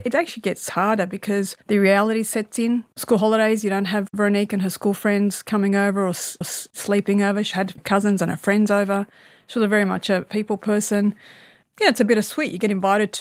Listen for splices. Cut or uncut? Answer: cut